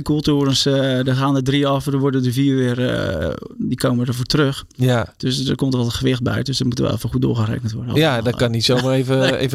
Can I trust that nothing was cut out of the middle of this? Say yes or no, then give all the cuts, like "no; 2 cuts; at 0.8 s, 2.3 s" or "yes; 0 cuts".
yes; 0 cuts